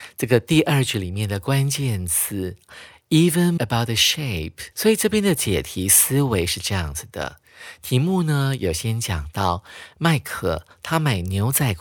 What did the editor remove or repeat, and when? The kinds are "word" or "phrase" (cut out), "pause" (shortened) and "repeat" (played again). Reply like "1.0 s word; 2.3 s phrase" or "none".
3.6 s word; 4.7 s pause